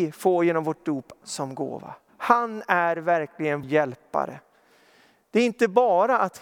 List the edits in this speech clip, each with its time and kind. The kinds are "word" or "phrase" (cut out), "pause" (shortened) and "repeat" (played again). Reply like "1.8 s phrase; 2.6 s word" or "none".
1.2 s word; 2.1 s pause; 3.6 s word